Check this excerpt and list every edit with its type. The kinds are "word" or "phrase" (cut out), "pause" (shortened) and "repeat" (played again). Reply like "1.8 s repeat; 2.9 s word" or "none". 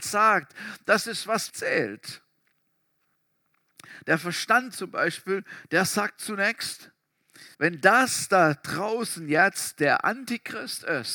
1.5 s word; 7.5 s pause